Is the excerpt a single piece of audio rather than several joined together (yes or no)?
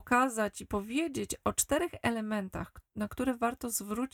yes